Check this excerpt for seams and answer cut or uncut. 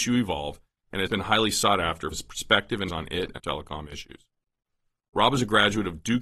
cut